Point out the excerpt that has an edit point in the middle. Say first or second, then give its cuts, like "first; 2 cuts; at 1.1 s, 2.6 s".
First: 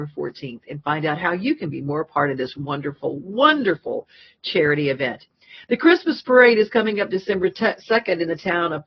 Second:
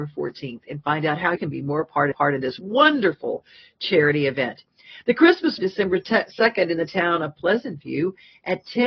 second; 4 cuts; at 1.4 s, 2.1 s, 2.6 s, 5.6 s